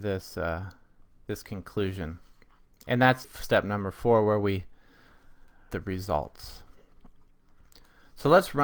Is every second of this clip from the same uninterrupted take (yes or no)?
no